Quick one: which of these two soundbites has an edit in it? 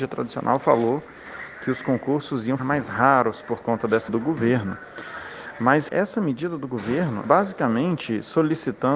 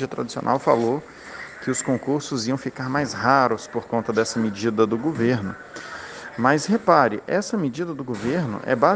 first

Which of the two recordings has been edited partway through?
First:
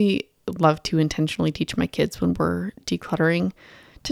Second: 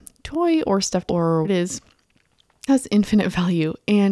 second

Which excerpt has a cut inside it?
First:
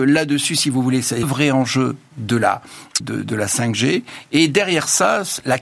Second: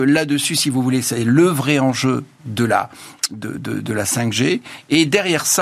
first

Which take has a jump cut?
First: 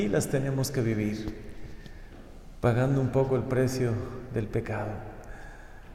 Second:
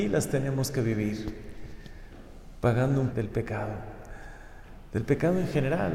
second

